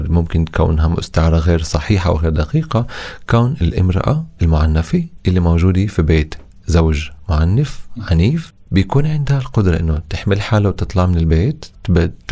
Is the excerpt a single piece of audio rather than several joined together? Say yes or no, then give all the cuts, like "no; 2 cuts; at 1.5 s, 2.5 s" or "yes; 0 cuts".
no; 1 cut; at 4.3 s